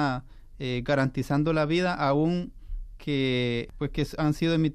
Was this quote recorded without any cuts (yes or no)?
yes